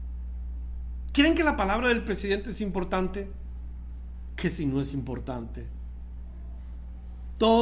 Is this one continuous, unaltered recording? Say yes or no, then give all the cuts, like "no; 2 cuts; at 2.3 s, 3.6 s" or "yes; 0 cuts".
yes; 0 cuts